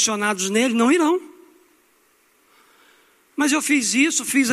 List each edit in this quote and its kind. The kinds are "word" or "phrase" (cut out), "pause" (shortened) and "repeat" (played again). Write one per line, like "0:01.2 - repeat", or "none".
none